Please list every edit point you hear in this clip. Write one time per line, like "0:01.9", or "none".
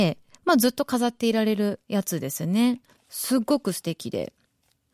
0:01.8
0:03.0